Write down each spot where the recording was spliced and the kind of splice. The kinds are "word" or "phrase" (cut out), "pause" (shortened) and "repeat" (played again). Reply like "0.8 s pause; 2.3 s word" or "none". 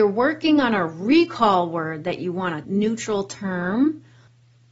2.6 s word

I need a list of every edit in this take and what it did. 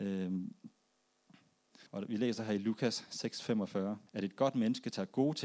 1.9 s pause; 4.1 s pause

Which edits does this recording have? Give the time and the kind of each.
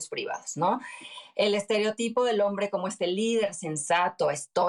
none

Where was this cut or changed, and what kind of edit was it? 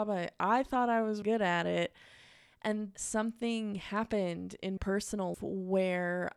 1.2 s word; 2.9 s word; 4.8 s word; 5.3 s word

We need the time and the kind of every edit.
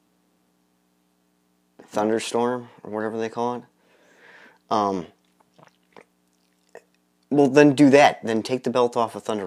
none

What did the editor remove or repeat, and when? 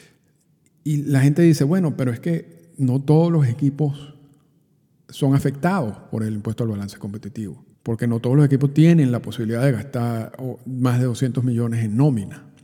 7.7 s pause

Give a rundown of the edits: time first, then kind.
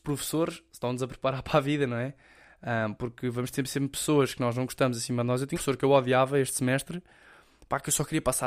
5.5 s word

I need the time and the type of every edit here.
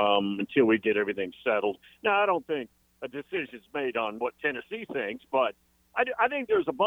none

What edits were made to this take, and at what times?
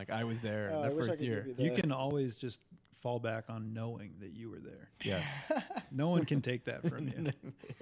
none

